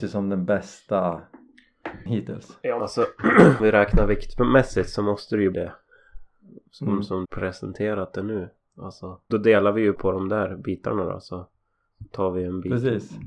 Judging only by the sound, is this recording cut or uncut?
cut